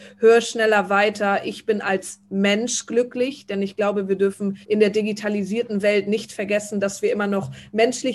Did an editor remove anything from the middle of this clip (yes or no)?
yes